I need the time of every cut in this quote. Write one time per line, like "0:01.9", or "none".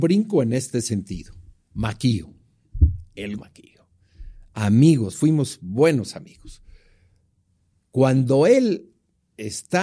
0:03.4